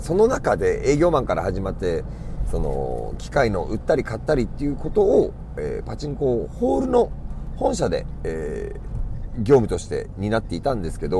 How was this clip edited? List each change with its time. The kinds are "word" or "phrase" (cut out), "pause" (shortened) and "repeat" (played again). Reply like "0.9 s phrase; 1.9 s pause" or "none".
none